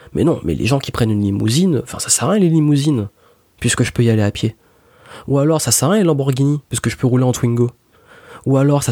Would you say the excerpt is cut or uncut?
uncut